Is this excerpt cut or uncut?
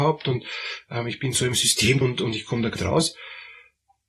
cut